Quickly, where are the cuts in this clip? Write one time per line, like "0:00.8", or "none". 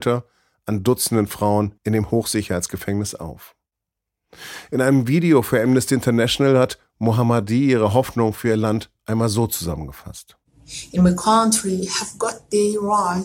0:01.8